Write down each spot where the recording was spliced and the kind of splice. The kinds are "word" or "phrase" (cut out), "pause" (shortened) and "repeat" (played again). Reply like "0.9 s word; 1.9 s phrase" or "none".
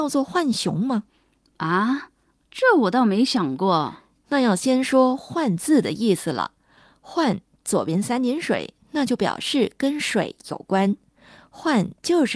none